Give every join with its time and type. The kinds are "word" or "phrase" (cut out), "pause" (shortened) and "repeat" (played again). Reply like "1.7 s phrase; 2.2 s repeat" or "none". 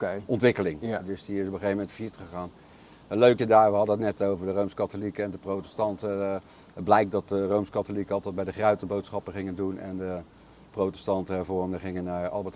3.4 s word